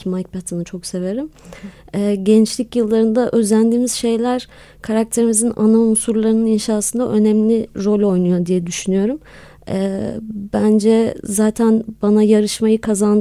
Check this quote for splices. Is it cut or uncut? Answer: uncut